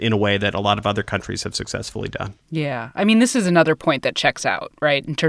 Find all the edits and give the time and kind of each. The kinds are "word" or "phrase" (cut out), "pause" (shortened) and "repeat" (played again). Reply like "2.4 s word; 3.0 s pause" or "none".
2.4 s pause